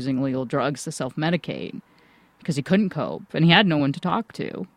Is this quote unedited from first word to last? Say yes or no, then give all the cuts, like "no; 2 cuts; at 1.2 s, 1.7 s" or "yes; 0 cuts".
yes; 0 cuts